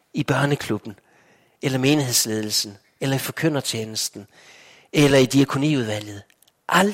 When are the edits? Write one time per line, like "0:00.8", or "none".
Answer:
none